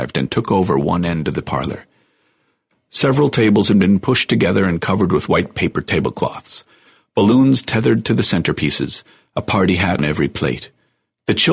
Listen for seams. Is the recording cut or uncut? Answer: cut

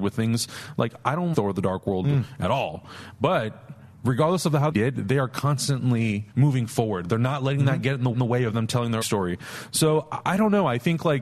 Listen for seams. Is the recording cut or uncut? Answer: cut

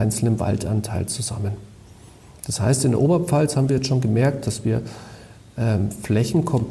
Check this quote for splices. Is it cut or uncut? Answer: uncut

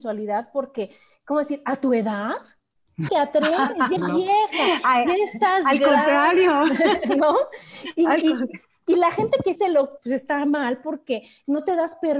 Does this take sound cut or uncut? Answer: cut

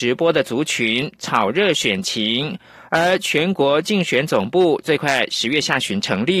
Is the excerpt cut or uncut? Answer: uncut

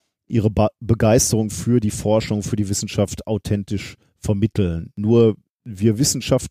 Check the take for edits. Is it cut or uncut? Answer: uncut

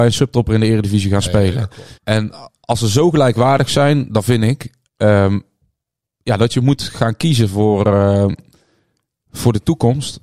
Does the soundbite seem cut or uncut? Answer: cut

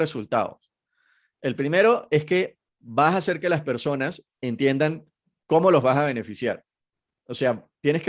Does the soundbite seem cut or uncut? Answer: uncut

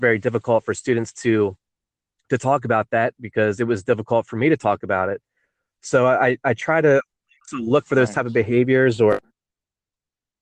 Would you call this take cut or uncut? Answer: uncut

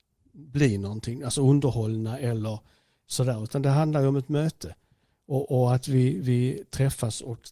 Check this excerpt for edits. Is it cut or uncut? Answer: uncut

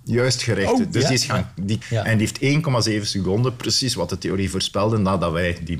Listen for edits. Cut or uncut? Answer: cut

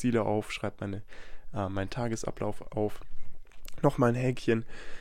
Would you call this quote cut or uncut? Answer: uncut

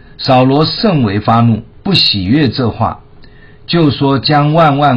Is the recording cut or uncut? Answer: cut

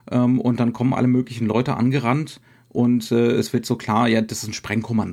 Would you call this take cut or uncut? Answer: uncut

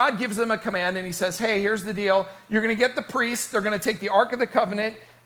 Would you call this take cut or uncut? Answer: uncut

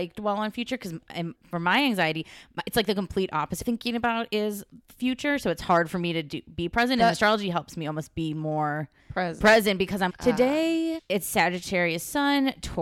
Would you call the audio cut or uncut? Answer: cut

